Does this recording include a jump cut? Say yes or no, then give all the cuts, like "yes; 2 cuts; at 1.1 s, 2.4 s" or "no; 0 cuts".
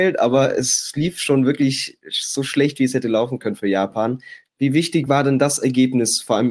no; 0 cuts